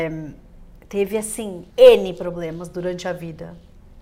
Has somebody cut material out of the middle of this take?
yes; 1 cut; at 1.7 s

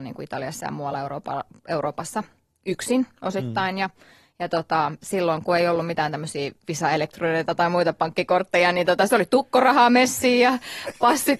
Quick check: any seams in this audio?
no; 0 cuts

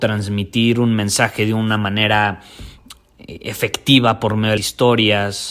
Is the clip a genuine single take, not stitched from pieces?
no; 1 cut; at 4.6 s

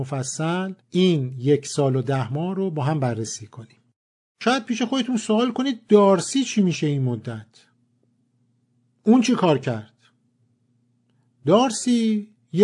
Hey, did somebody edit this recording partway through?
no; 0 cuts

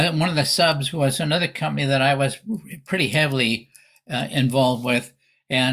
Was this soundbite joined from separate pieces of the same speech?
no; 0 cuts

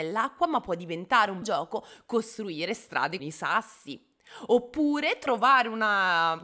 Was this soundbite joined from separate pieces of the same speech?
yes; 2 cuts; at 1.4 s, 3.2 s

